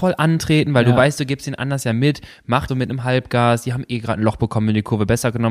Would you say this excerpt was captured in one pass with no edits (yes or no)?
no